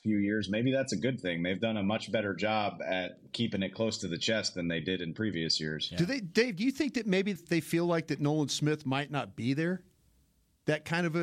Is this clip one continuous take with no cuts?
no; 1 cut; at 7.4 s

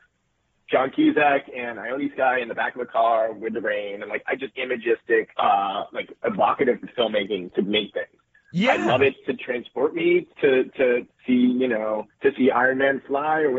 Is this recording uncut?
no; 6 cuts; at 4.5 s, 5.3 s, 6.8 s, 7.9 s, 10.3 s, 12.1 s

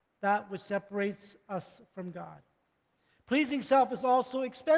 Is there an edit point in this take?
no; 0 cuts

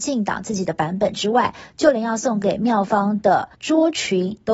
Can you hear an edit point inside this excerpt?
yes; 1 cut; at 3.5 s

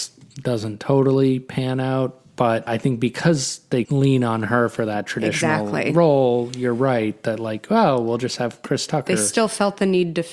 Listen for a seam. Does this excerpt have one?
yes; 1 cut; at 3.9 s

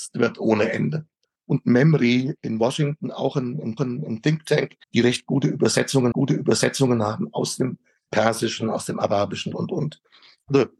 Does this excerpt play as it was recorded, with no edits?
no; 5 cuts; at 1.2 s, 3.8 s, 4.8 s, 6.1 s, 9.5 s

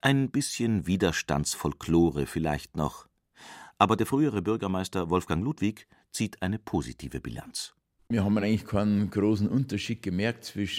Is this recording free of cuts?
yes; 0 cuts

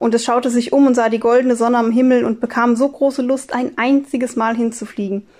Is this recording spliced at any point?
no; 0 cuts

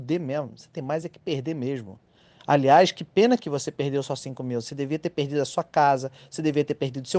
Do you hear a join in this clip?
no; 0 cuts

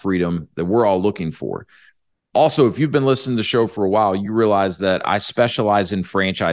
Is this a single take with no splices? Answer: yes; 0 cuts

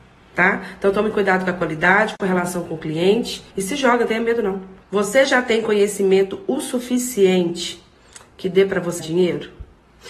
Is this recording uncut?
no; 3 cuts; at 3.5 s, 4.8 s, 9.0 s

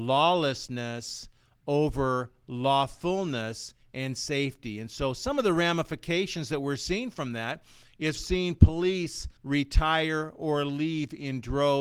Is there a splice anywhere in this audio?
yes; 2 cuts; at 8.2 s, 9.4 s

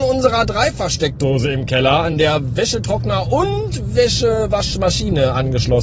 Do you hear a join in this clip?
no; 0 cuts

